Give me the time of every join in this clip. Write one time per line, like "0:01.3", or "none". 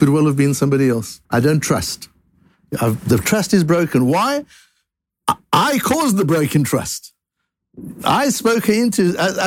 0:01.2